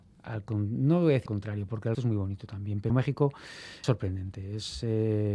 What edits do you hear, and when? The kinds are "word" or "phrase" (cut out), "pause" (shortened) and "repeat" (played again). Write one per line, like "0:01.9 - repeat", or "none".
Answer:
0:01.3 - word
0:01.9 - word
0:02.9 - word
0:03.8 - word